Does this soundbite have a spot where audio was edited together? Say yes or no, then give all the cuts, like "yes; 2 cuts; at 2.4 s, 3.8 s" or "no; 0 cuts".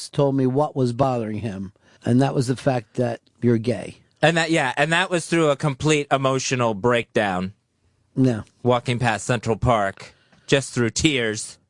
yes; 2 cuts; at 2.0 s, 3.3 s